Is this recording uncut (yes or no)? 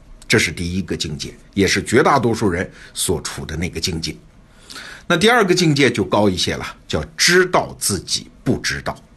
yes